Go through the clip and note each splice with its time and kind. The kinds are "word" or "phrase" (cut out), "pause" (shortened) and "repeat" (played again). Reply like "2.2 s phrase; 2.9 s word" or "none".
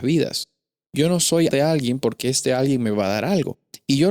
1.5 s word